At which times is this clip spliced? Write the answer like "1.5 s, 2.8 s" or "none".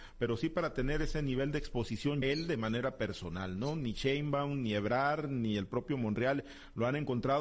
2.2 s